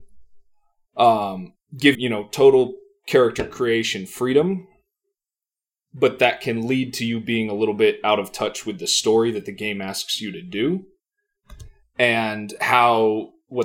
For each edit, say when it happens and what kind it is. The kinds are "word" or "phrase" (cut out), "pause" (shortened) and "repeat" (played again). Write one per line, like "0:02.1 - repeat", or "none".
0:01.9 - word